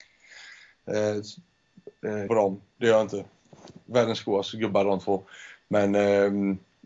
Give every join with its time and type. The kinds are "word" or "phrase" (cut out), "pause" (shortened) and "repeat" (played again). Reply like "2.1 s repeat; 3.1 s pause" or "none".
2.3 s phrase